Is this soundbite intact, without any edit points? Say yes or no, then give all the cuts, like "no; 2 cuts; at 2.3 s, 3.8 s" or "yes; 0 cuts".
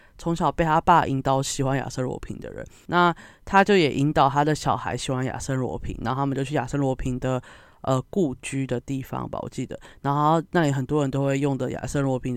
yes; 0 cuts